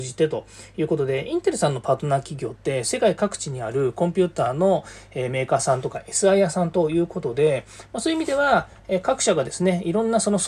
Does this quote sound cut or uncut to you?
uncut